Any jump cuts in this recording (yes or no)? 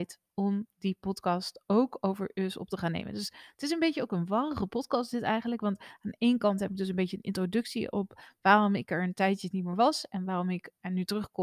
no